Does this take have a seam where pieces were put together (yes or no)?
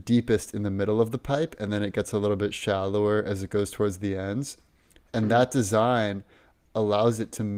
no